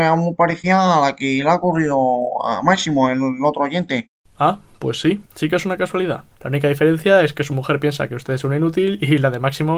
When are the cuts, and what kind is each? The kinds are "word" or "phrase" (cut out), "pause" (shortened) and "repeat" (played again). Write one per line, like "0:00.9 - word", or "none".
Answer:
0:04.1 - pause
0:05.3 - pause
0:06.3 - pause

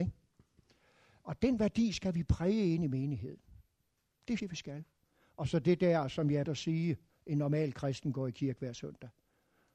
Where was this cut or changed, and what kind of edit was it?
0:04.4 - word
0:06.4 - word

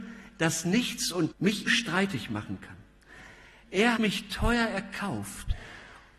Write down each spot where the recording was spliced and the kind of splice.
0:01.3 - word
0:01.7 - word
0:04.0 - word

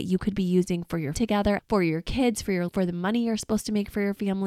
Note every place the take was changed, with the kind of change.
0:01.1 - phrase
0:01.6 - phrase
0:02.7 - word

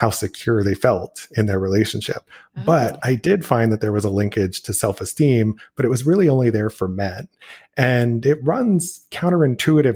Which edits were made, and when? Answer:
none

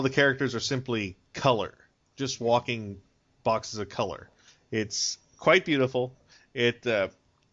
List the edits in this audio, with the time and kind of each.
none

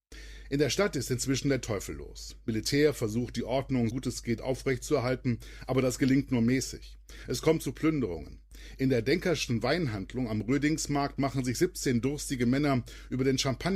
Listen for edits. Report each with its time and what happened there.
0:03.9 - word

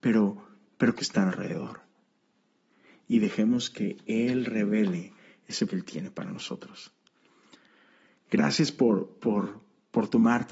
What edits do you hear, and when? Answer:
0:01.0 - phrase
0:01.3 - phrase
0:05.7 - phrase

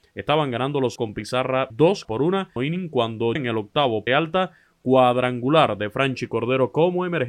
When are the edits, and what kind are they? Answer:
0:01.0 - word
0:01.7 - word
0:02.0 - word
0:02.6 - phrase
0:03.4 - word
0:04.1 - word

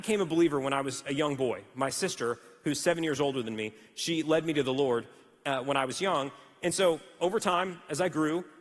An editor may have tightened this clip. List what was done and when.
none

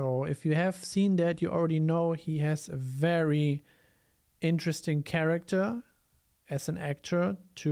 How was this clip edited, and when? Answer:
none

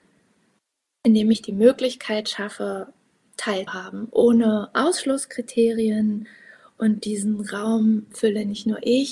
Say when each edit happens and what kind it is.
0:03.7 - word

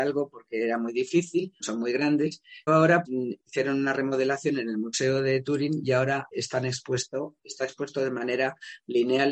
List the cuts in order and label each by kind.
0:01.6 - word
0:02.7 - word
0:03.0 - word
0:06.3 - word

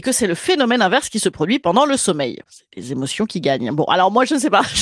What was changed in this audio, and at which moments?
none

